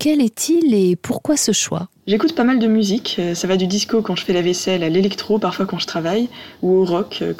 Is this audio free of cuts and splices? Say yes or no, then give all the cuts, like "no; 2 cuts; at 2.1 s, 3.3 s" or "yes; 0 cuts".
yes; 0 cuts